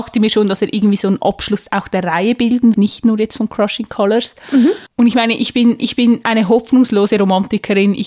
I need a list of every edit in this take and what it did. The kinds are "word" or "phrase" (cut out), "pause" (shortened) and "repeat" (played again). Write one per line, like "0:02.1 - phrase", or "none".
0:02.7 - word
0:04.9 - pause
0:05.8 - repeat